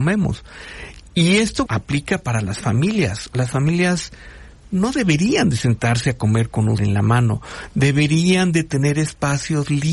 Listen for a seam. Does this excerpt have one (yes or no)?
yes